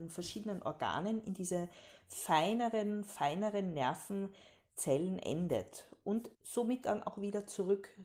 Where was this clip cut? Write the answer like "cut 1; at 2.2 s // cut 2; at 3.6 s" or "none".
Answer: cut 1; at 6.3 s

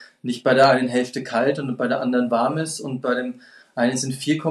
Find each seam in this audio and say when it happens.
none

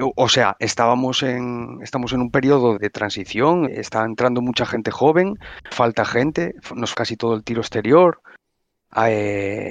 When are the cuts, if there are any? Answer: cut 1; at 2.8 s // cut 2; at 3.7 s // cut 3; at 5.7 s // cut 4; at 6.9 s

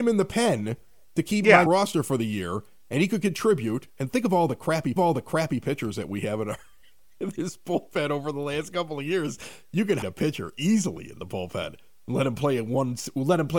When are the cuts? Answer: cut 1; at 1.7 s // cut 2; at 5.0 s // cut 3; at 10.0 s

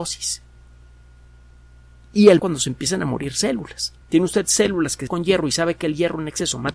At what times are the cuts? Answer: cut 1; at 2.4 s // cut 2; at 4.0 s // cut 3; at 5.1 s

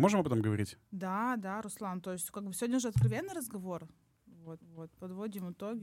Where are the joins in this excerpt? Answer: cut 1; at 4.6 s

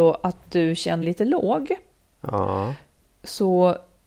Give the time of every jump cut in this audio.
cut 1; at 1.0 s

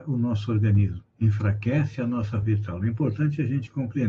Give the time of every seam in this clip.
cut 1; at 1.1 s // cut 2; at 2.4 s

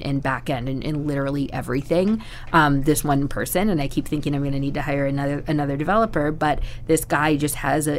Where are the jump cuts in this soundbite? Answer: none

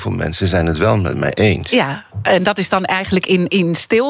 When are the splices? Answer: none

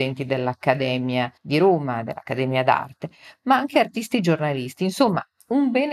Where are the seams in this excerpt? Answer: cut 1; at 1.4 s

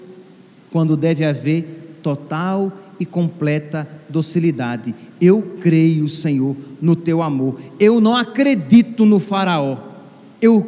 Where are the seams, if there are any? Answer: none

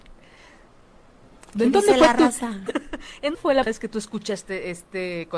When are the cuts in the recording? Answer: cut 1; at 2.7 s // cut 2; at 3.3 s // cut 3; at 3.7 s

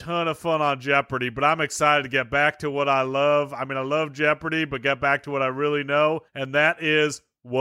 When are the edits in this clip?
cut 1; at 6.3 s

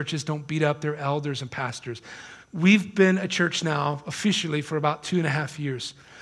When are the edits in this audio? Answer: cut 1; at 2.4 s

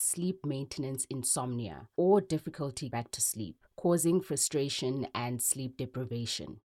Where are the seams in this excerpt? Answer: cut 1; at 1.9 s // cut 2; at 2.9 s // cut 3; at 3.7 s

